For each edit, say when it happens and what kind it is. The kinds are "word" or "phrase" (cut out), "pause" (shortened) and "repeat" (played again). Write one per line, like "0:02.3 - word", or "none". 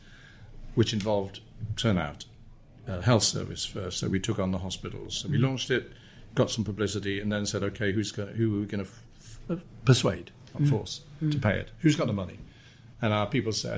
none